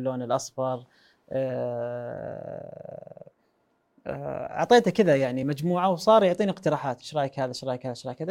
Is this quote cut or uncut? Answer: uncut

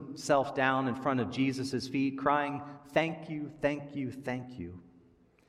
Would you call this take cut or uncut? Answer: uncut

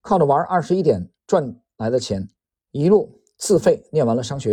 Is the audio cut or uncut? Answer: cut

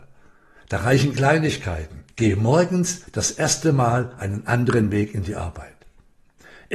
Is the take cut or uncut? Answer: cut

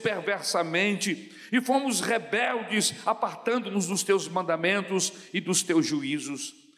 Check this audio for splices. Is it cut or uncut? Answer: uncut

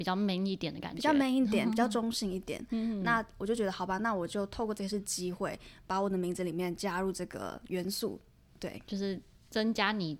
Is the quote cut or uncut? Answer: uncut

